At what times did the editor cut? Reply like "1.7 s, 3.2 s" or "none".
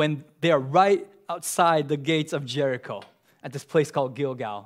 none